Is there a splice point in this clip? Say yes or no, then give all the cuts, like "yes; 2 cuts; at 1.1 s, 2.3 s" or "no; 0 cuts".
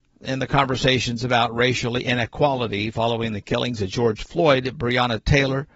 no; 0 cuts